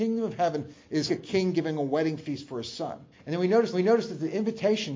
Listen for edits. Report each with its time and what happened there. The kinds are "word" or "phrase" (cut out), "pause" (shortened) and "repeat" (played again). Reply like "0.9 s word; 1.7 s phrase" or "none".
1.1 s word; 3.1 s pause; 3.7 s repeat